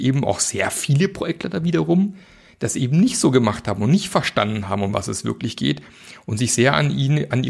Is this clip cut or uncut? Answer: uncut